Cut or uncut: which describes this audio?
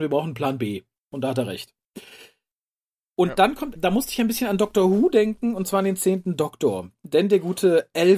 cut